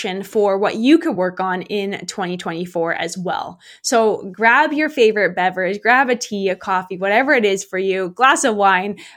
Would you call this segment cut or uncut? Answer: uncut